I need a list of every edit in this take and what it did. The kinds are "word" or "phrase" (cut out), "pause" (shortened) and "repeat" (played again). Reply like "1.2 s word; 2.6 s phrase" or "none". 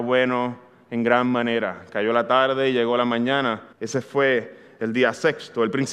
3.7 s pause